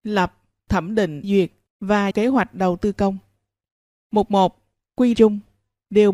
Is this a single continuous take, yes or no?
no